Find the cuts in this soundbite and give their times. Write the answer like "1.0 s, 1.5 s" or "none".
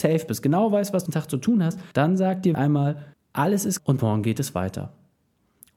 1.1 s, 1.9 s, 2.5 s, 3.1 s, 3.8 s